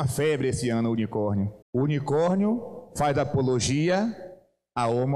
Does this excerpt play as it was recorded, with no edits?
no; 1 cut; at 1.6 s

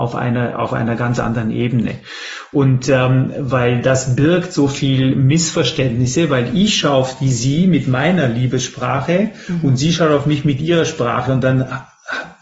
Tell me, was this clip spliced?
no; 0 cuts

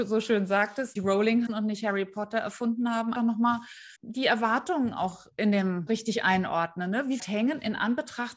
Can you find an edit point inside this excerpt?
yes; 6 cuts; at 1.0 s, 1.5 s, 3.2 s, 4.0 s, 5.9 s, 7.2 s

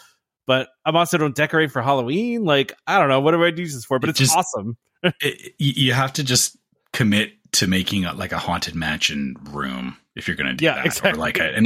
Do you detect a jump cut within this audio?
no; 0 cuts

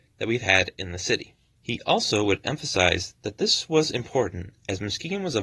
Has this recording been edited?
yes; 1 cut; at 1.5 s

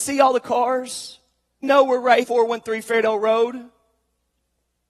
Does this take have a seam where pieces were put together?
yes; 2 cuts; at 1.6 s, 2.2 s

